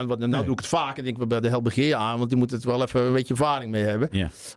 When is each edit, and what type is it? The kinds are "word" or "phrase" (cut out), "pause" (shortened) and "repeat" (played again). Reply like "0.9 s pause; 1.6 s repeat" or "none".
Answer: none